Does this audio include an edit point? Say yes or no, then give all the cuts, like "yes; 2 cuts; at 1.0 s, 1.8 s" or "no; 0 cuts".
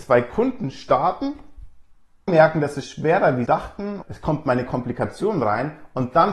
yes; 4 cuts; at 2.3 s, 3.5 s, 4.0 s, 4.7 s